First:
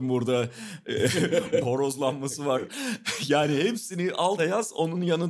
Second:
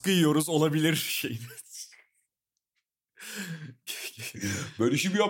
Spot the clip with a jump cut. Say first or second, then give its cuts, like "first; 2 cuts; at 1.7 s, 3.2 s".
first; 2 cuts; at 1.6 s, 4.4 s